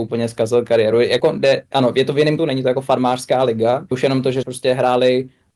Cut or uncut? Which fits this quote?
cut